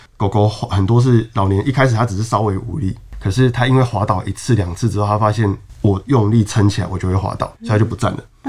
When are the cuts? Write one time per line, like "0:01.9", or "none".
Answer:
0:07.6